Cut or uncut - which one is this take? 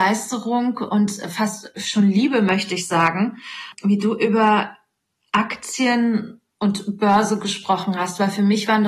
cut